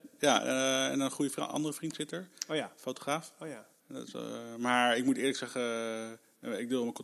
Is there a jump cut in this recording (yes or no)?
no